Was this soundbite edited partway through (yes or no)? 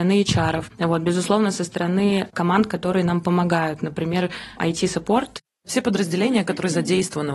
no